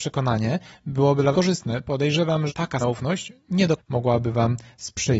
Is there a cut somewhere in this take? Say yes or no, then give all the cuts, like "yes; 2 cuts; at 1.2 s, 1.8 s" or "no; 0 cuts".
yes; 4 cuts; at 1.3 s, 2.5 s, 2.8 s, 3.8 s